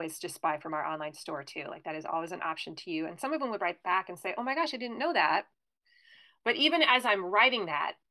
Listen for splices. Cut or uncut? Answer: uncut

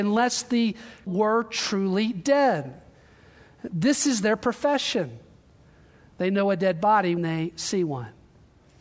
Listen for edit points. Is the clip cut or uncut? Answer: cut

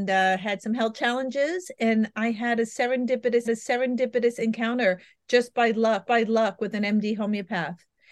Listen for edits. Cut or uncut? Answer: cut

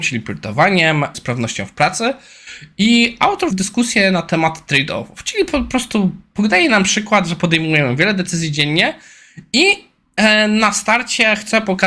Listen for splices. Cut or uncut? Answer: cut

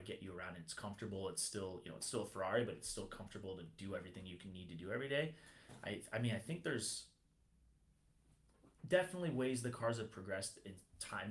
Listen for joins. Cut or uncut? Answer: uncut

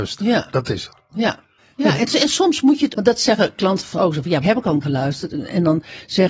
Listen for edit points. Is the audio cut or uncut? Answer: cut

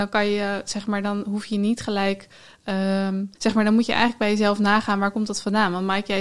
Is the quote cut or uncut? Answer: cut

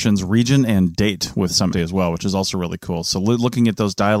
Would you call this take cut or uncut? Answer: cut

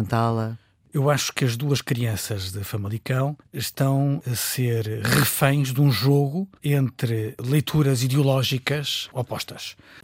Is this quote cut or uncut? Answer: cut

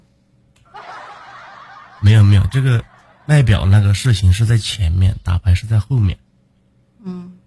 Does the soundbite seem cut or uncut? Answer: cut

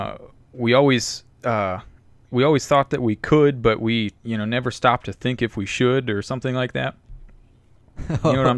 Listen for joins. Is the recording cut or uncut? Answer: cut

